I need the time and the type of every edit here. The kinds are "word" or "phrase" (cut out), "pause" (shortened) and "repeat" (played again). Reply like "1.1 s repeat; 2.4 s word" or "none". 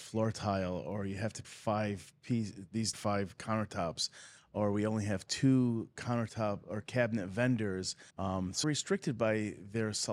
1.4 s word; 2.9 s word; 8.1 s pause; 8.6 s word